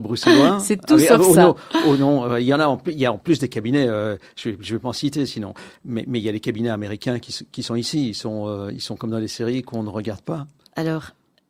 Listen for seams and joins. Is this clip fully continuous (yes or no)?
yes